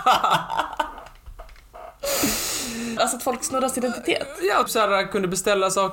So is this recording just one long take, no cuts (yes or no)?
no